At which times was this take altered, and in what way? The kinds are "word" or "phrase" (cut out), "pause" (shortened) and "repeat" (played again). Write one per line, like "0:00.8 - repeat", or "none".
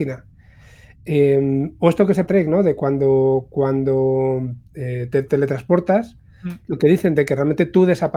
0:02.3 - phrase
0:04.7 - pause